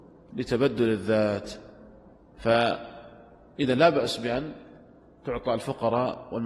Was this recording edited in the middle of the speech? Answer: no; 0 cuts

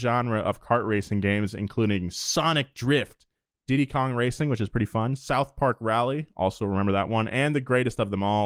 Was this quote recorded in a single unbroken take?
yes; 0 cuts

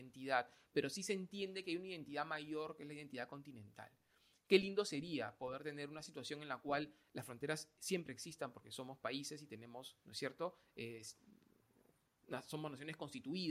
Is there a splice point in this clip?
no; 0 cuts

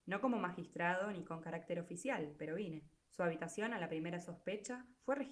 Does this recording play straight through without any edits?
no; 1 cut; at 3.0 s

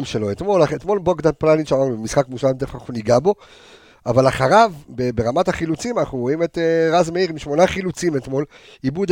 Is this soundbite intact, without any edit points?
yes; 0 cuts

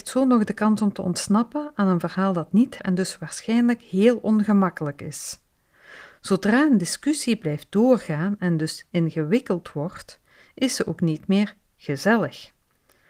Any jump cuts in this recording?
yes; 1 cut; at 2.8 s

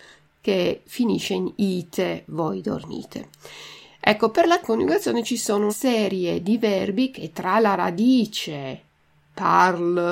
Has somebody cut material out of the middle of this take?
yes; 2 cuts; at 4.6 s, 5.7 s

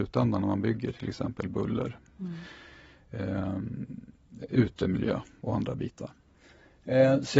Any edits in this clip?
no; 0 cuts

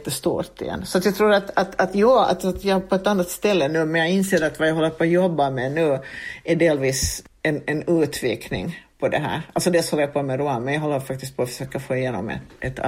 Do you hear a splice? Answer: no; 0 cuts

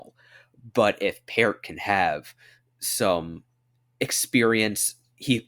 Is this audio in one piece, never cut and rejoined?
yes; 0 cuts

